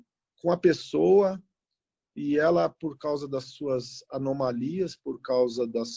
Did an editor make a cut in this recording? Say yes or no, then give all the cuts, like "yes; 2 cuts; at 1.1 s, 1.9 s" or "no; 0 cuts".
no; 0 cuts